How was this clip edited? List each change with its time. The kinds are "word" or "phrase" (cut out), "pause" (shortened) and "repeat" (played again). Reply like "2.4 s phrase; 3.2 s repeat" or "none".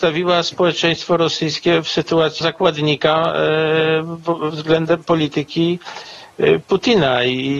2.4 s word